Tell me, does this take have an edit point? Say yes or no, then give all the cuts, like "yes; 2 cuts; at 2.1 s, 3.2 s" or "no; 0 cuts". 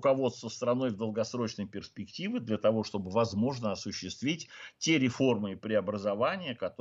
no; 0 cuts